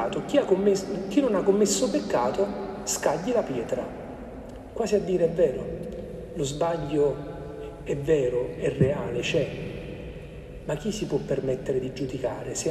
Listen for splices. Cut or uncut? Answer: uncut